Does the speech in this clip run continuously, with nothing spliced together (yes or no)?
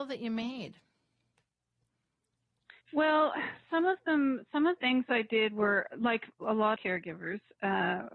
no